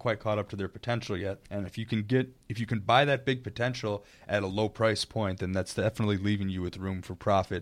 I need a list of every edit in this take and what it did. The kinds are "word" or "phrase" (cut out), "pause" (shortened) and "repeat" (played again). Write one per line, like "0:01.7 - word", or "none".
0:01.4 - pause
0:02.4 - pause